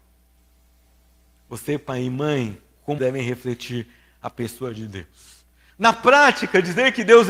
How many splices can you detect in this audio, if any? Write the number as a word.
one